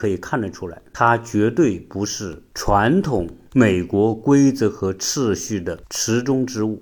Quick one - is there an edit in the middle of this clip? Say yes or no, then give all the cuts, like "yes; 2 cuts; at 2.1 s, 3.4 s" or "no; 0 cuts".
yes; 1 cut; at 5.8 s